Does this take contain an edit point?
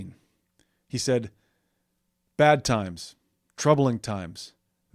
no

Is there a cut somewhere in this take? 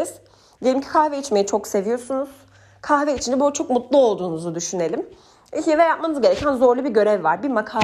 no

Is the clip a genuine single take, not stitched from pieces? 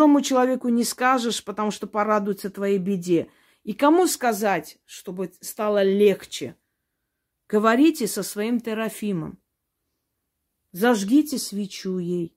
yes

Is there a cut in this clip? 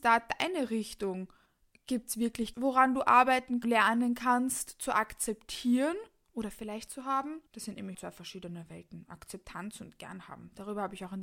yes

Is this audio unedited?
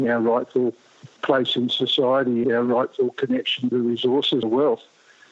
no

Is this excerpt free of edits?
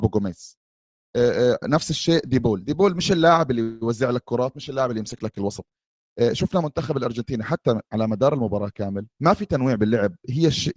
no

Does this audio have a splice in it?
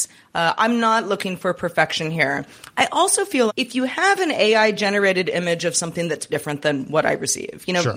yes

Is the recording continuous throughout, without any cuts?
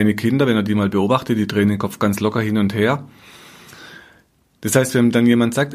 yes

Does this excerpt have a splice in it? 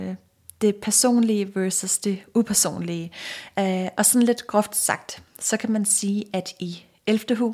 no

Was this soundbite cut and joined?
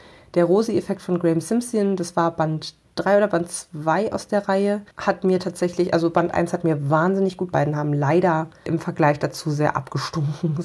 yes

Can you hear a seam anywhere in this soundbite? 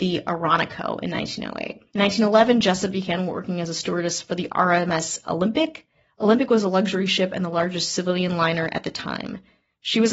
yes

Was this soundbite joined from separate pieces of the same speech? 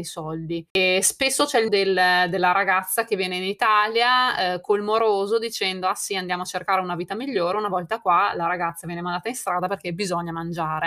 yes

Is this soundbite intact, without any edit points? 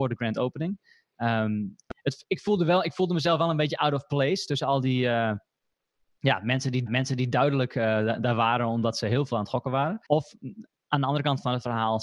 no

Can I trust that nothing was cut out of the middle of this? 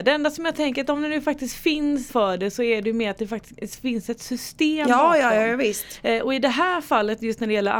no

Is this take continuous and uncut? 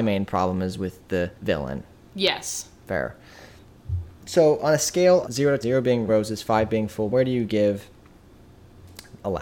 no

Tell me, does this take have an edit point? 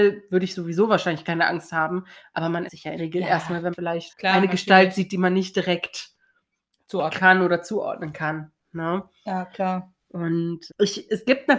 yes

